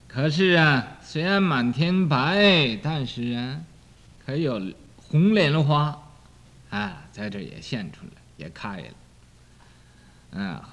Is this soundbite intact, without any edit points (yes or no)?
yes